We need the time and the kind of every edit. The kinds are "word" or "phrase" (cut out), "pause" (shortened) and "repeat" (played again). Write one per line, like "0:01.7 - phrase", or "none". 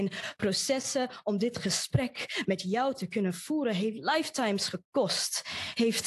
none